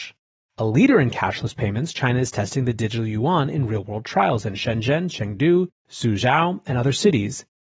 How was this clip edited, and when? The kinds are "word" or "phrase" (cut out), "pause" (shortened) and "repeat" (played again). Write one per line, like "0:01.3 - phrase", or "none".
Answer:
none